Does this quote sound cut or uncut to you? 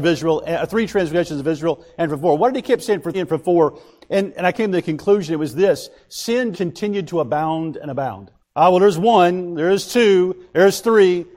cut